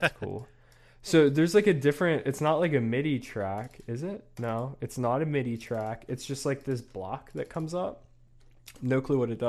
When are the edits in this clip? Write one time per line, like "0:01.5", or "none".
none